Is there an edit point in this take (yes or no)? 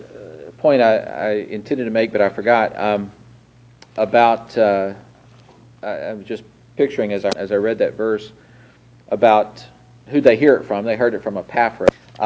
no